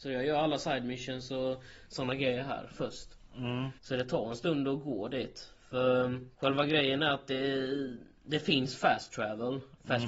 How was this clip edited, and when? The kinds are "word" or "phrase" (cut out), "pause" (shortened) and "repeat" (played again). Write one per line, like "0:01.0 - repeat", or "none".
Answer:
0:03.8 - pause
0:06.3 - pause